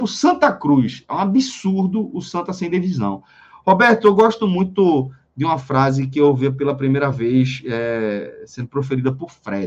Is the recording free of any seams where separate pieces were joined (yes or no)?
yes